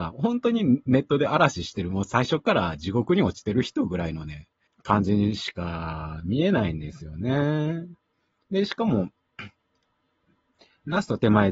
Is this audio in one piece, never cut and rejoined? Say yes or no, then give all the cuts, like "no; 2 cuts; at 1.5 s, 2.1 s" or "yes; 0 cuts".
no; 1 cut; at 4.7 s